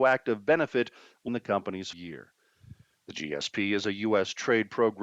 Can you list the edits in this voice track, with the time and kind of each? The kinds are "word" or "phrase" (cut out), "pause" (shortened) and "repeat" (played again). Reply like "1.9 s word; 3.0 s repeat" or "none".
1.3 s phrase; 1.9 s word